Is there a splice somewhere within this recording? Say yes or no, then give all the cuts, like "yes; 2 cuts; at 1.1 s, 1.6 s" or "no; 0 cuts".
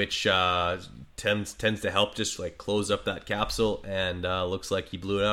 no; 0 cuts